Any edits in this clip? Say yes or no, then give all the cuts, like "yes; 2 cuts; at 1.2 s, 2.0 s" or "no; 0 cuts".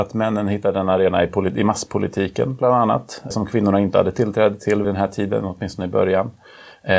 yes; 2 cuts; at 3.3 s, 4.8 s